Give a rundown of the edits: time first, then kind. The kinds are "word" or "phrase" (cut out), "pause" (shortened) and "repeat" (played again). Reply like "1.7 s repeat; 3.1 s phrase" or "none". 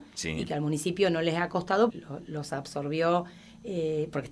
1.9 s word